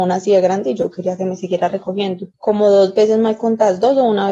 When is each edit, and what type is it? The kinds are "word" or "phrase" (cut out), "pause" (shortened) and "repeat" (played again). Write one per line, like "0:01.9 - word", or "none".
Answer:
0:02.3 - pause